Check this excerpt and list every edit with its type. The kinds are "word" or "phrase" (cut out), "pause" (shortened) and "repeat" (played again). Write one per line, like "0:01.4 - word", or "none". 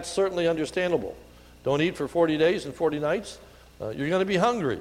none

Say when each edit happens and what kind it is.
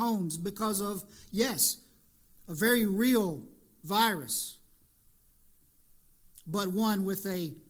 none

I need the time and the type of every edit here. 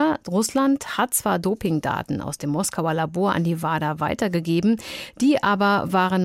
none

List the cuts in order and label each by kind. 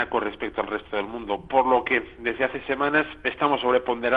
none

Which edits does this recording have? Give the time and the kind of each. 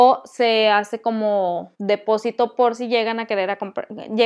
0:01.7 - pause

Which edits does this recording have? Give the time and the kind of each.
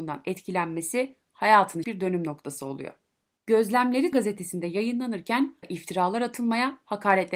0:01.8 - word
0:04.1 - word
0:05.6 - word

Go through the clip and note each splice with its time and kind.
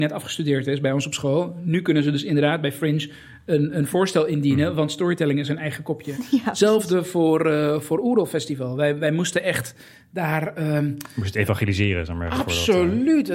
none

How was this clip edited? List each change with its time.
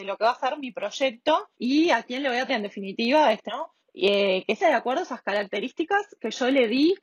0:01.5 - pause
0:02.5 - word
0:03.5 - word
0:03.8 - pause
0:04.6 - word

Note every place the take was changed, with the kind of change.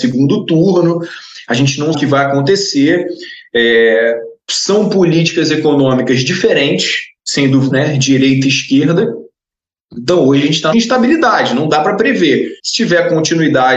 0:01.9 - word
0:04.4 - pause
0:07.2 - pause
0:07.7 - word
0:10.7 - phrase
0:12.6 - pause

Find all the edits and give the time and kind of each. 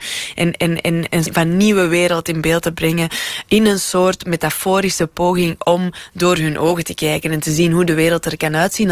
0:01.3 - word

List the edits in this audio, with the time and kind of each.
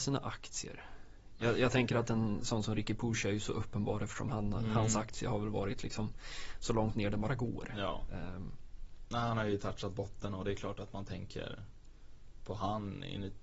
none

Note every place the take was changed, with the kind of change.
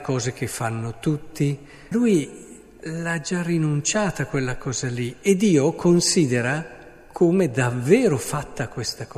0:01.9 - word

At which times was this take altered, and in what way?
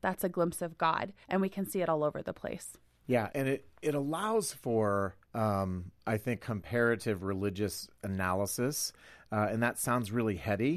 0:01.2 - pause
0:03.3 - word
0:05.2 - pause
0:06.4 - phrase

